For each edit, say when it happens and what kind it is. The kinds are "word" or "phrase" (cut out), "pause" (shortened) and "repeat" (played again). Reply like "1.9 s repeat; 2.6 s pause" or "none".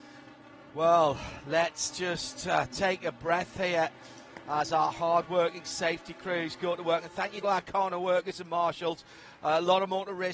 7.4 s phrase